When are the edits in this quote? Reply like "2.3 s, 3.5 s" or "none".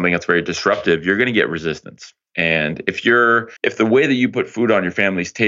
3.6 s